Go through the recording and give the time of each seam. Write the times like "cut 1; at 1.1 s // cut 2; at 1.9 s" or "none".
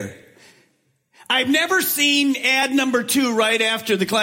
none

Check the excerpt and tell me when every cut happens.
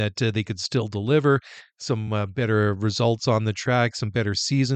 none

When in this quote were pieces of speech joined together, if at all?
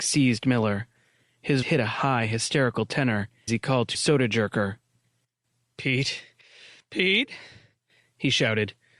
cut 1; at 1.6 s // cut 2; at 3.5 s // cut 3; at 3.9 s

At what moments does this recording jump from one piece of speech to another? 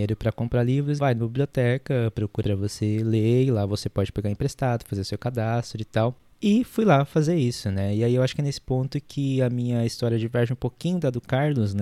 cut 1; at 1.0 s // cut 2; at 2.4 s

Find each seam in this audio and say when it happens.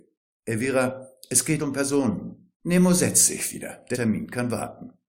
cut 1; at 1.6 s // cut 2; at 2.5 s // cut 3; at 3.9 s

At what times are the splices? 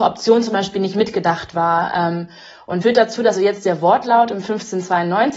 cut 1; at 2.8 s // cut 2; at 3.3 s

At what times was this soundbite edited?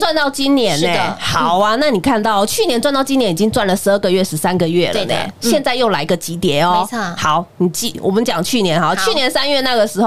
none

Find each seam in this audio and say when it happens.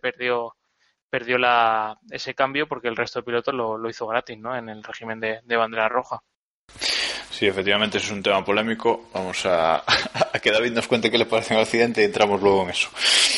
none

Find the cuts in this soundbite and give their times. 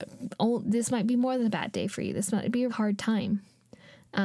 cut 1; at 2.7 s

